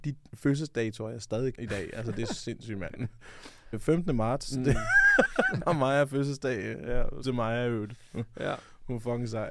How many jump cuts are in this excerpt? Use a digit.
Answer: 5